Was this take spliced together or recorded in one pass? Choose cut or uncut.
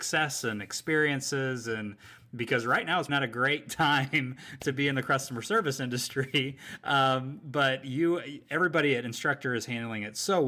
cut